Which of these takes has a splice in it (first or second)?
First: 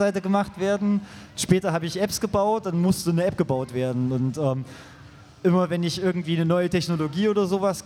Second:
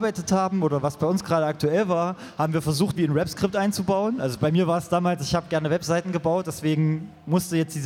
second